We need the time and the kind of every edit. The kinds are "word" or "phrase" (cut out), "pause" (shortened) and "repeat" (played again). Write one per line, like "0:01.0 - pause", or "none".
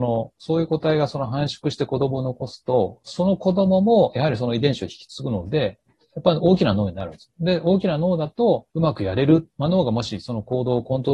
0:08.7 - pause